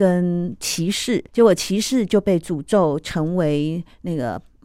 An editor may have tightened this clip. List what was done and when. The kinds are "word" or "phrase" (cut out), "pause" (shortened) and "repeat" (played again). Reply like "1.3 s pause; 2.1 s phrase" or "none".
1.3 s pause